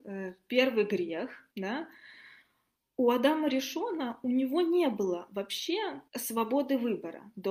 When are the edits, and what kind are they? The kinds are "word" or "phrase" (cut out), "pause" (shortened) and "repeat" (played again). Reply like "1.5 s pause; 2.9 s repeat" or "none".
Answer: 1.5 s pause; 6.1 s pause